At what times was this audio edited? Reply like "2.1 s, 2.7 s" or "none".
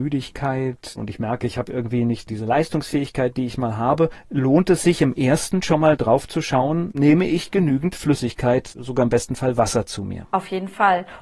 none